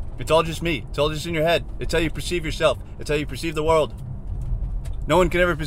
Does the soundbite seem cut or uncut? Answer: uncut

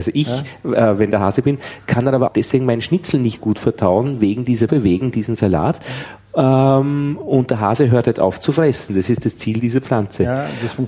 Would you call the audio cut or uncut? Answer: cut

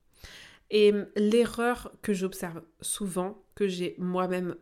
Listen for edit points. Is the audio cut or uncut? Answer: uncut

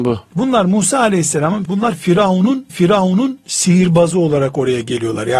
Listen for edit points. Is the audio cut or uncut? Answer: cut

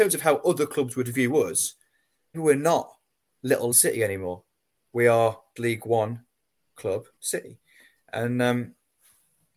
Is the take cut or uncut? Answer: cut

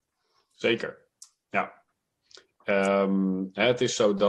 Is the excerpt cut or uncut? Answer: uncut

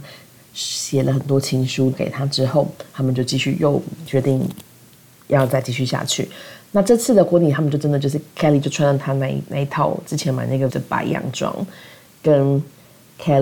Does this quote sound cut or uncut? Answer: cut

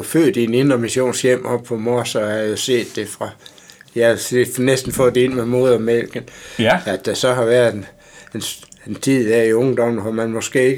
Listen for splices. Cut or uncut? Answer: uncut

